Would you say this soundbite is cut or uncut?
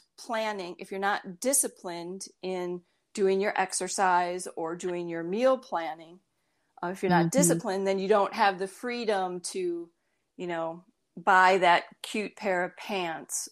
uncut